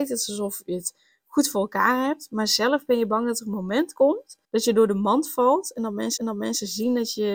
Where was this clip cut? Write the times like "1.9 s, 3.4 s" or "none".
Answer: 4.4 s, 6.2 s